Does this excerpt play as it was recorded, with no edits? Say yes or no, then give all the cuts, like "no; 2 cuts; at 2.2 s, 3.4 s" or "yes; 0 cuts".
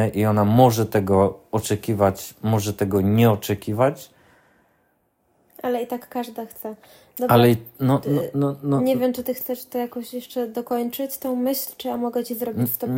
yes; 0 cuts